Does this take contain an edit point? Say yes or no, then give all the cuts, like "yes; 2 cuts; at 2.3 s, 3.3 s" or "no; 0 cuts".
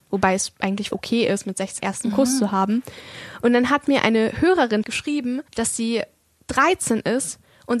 yes; 4 cuts; at 0.9 s, 1.8 s, 4.8 s, 5.5 s